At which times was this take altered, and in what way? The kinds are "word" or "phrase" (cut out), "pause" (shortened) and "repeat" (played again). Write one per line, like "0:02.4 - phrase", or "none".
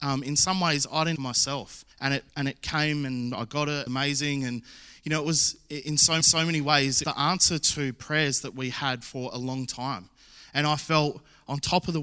0:01.2 - phrase
0:01.9 - pause
0:02.3 - pause
0:03.9 - phrase
0:06.2 - repeat
0:07.0 - phrase